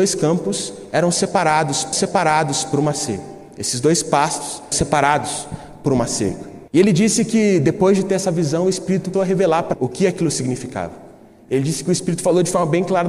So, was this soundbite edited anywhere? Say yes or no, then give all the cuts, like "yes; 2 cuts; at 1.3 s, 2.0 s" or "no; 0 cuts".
yes; 5 cuts; at 1.9 s, 4.7 s, 6.7 s, 9.1 s, 9.7 s